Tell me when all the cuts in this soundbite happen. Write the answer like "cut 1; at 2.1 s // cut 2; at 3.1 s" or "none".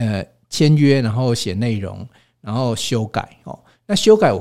none